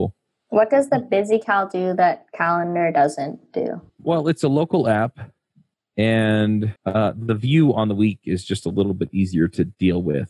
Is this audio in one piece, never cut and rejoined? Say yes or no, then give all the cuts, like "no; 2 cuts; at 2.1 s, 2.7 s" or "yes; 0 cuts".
no; 2 cuts; at 3.9 s, 6.8 s